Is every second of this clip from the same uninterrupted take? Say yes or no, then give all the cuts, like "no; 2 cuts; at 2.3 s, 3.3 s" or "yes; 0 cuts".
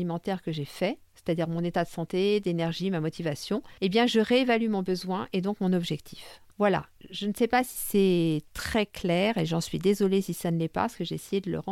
no; 3 cuts; at 1.1 s, 3.8 s, 6.5 s